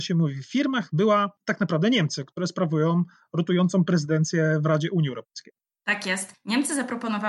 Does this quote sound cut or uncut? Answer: uncut